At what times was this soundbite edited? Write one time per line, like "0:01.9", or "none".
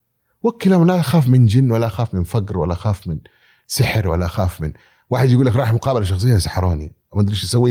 none